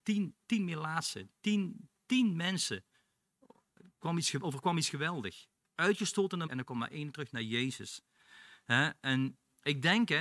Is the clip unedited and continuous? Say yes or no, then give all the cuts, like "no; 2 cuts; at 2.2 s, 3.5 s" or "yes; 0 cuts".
no; 1 cut; at 6.5 s